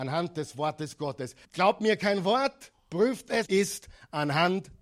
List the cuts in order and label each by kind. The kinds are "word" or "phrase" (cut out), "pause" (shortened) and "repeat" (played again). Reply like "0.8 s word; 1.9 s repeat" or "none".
1.4 s pause; 3.5 s phrase